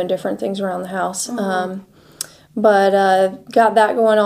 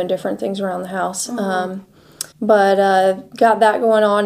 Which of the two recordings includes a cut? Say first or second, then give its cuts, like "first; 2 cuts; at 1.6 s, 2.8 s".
second; 1 cut; at 2.3 s